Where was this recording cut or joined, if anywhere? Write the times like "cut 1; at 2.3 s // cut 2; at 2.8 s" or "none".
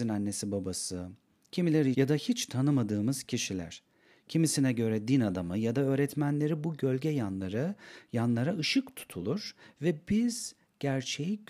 cut 1; at 1.9 s